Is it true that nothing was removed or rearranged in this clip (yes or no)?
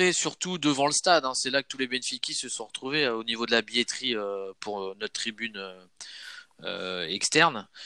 yes